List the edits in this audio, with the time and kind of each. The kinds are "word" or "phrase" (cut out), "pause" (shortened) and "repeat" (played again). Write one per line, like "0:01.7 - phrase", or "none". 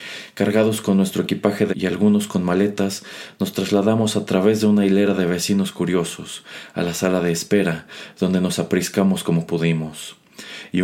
0:01.7 - word